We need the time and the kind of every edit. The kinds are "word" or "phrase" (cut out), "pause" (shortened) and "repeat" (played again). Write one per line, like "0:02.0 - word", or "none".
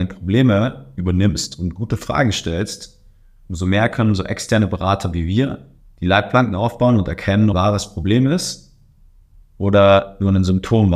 0:07.5 - phrase